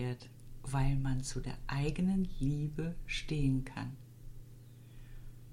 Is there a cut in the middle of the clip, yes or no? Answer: no